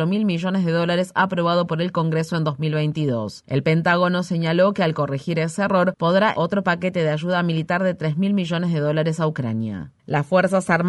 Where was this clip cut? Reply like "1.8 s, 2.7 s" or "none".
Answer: 6.3 s